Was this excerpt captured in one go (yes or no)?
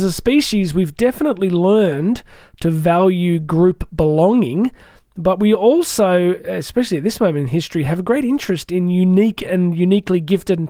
yes